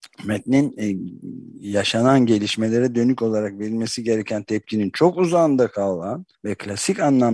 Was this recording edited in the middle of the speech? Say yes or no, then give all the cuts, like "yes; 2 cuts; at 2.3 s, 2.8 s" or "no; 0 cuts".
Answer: yes; 1 cut; at 6.3 s